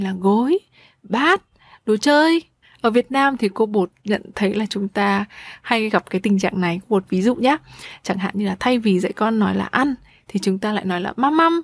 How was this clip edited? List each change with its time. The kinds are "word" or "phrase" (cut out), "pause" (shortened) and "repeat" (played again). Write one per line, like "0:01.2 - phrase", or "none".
none

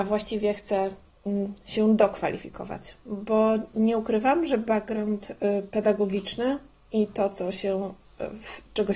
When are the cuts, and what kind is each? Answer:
none

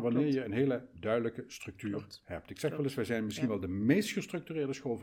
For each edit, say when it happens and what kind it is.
none

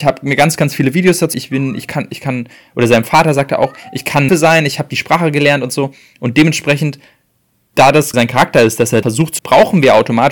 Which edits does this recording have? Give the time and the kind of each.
0:01.3 - word
0:04.3 - word
0:08.1 - word
0:09.0 - word
0:09.4 - word

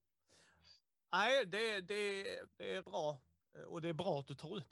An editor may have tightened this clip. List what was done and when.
0:02.5 - word
0:02.8 - word

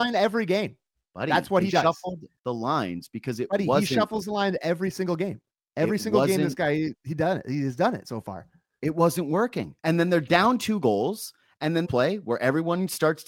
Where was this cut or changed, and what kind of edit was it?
0:09.8 - pause
0:11.8 - phrase

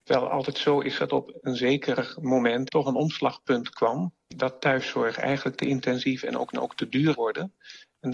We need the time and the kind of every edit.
0:01.0 - word
0:02.7 - word
0:06.5 - repeat
0:07.1 - word

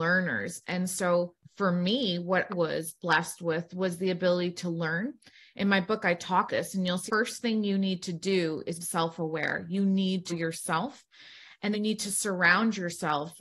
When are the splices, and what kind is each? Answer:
0:02.5 - word
0:06.5 - word
0:07.1 - word
0:08.8 - word
0:10.3 - word
0:11.7 - word

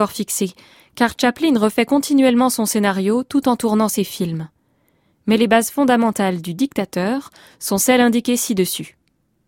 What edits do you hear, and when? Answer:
none

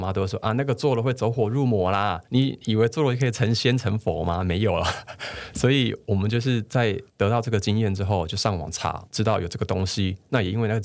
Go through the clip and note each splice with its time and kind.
0:02.2 - pause
0:07.1 - pause
0:09.1 - word

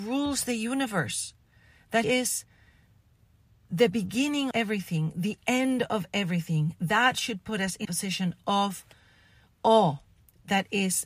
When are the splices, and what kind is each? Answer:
0:02.0 - word
0:04.5 - word
0:07.8 - word

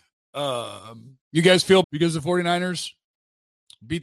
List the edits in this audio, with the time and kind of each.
0:01.2 - pause
0:01.8 - word

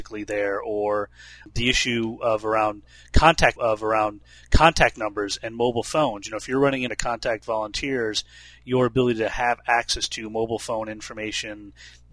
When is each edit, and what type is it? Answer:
0:03.6 - repeat
0:06.9 - phrase

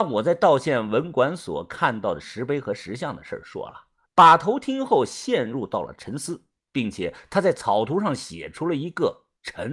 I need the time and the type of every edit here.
0:04.1 - pause

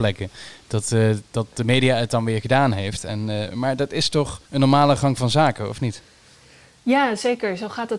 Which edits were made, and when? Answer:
0:04.5 - pause

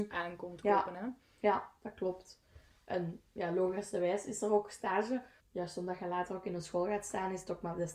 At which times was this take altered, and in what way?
none

